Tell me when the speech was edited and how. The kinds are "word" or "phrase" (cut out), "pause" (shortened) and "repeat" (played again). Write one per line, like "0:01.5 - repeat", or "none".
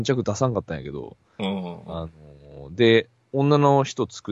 none